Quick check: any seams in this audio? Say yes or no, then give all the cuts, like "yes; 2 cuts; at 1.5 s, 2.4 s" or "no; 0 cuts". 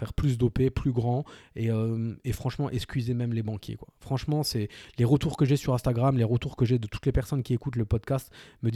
no; 0 cuts